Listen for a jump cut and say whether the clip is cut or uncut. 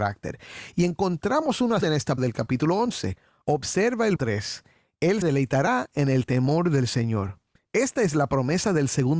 cut